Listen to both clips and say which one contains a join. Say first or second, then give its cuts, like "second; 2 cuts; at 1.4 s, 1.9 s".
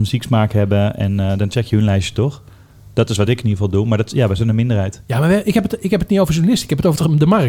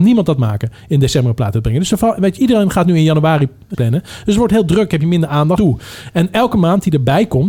second; 2 cuts; at 3.7 s, 5.6 s